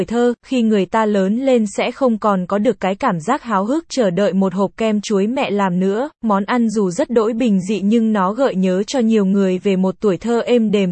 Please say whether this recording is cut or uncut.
uncut